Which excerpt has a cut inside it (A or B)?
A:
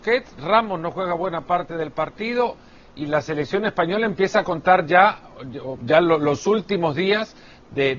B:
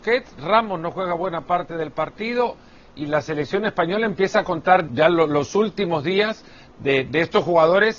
B